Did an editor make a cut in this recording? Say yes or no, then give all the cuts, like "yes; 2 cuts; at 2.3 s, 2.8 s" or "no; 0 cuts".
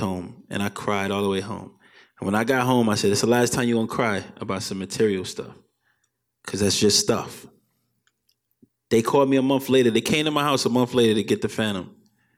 no; 0 cuts